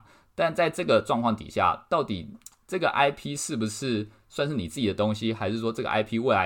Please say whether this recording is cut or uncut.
uncut